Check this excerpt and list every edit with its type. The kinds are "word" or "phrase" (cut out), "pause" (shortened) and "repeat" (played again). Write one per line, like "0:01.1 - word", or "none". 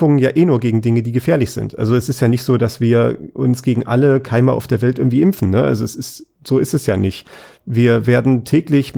none